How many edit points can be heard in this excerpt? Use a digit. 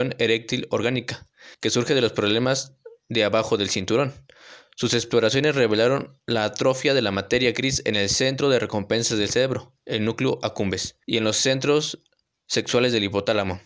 3